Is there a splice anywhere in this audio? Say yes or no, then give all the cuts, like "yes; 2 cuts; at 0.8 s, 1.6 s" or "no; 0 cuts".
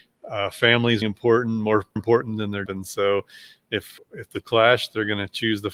yes; 5 cuts; at 1.0 s, 2.0 s, 2.7 s, 4.0 s, 4.4 s